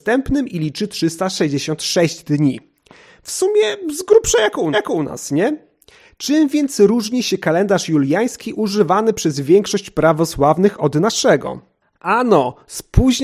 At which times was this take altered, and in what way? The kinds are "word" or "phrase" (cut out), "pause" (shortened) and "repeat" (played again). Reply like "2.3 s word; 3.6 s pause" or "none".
4.7 s repeat